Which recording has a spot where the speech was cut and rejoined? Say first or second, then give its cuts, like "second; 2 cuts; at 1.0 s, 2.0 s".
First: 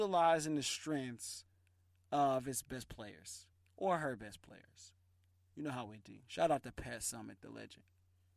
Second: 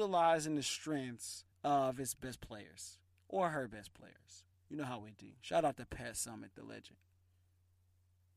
second; 2 cuts; at 1.5 s, 4.5 s